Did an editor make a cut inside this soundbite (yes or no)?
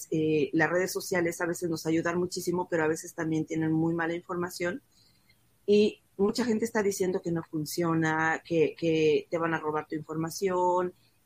no